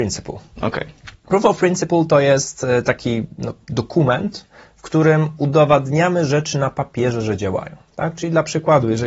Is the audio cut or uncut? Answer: cut